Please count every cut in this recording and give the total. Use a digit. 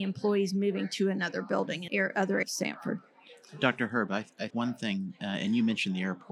3